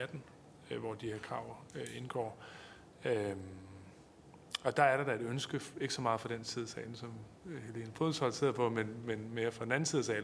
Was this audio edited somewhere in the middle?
no; 0 cuts

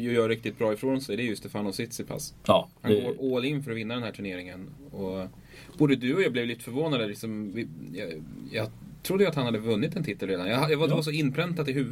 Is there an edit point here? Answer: yes; 1 cut; at 2.7 s

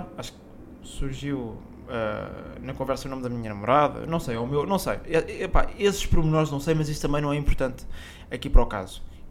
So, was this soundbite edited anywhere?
no; 0 cuts

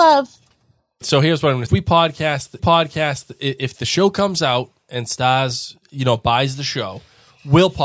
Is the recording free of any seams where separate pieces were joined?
no; 3 cuts; at 1.0 s, 1.7 s, 2.6 s

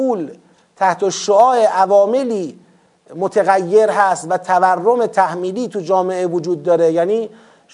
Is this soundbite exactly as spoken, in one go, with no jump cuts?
yes; 0 cuts

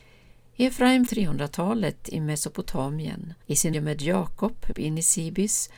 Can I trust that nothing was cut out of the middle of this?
no; 4 cuts; at 1.1 s, 3.4 s, 3.7 s, 4.7 s

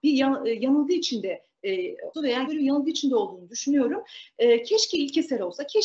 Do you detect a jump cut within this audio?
yes; 2 cuts; at 2.1 s, 2.5 s

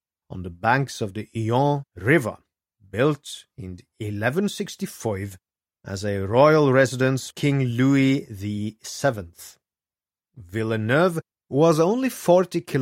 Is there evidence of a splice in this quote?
yes; 3 cuts; at 1.9 s, 7.3 s, 11.3 s

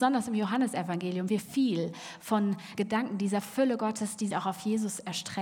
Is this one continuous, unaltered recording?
no; 3 cuts; at 1.3 s, 2.8 s, 4.3 s

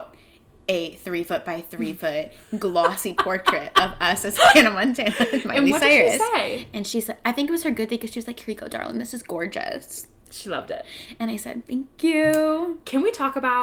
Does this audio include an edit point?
no; 0 cuts

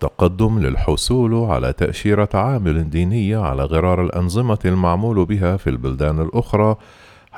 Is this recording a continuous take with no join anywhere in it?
yes; 0 cuts

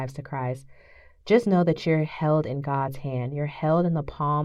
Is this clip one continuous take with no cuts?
yes; 0 cuts

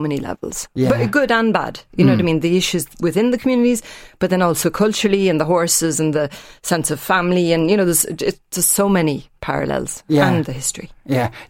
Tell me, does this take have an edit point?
no; 0 cuts

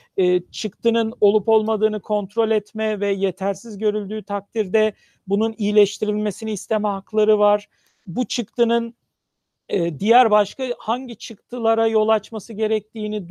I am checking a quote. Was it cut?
no; 0 cuts

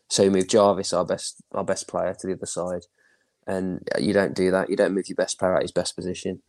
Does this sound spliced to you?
no; 0 cuts

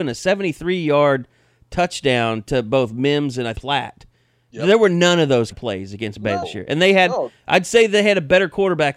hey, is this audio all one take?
no; 3 cuts; at 3.6 s, 5.5 s, 6.4 s

